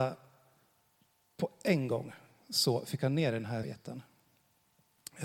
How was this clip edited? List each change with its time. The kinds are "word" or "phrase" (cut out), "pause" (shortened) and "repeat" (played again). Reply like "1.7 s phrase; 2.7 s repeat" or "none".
3.6 s word